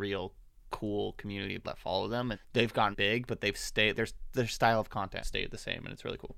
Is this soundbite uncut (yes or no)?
no